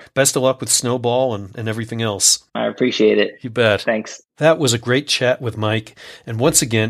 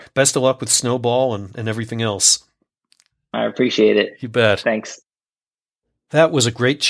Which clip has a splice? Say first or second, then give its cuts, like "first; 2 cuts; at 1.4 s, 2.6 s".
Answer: first; 2 cuts; at 2.5 s, 4.3 s